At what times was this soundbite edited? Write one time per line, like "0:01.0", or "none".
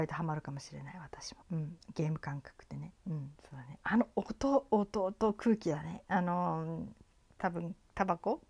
0:01.4
0:03.0
0:03.4